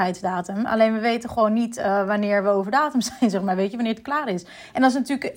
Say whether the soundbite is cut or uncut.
uncut